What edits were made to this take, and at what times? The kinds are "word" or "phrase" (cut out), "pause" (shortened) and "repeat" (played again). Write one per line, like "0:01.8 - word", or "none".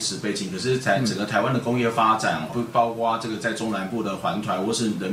0:02.5 - word